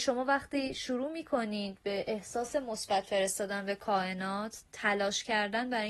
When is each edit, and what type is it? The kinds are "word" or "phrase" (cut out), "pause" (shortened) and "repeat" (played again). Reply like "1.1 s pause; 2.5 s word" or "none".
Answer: none